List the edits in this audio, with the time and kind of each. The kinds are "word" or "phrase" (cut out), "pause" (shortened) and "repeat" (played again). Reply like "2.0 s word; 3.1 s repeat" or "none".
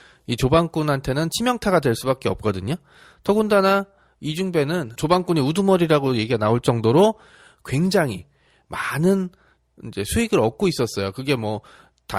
none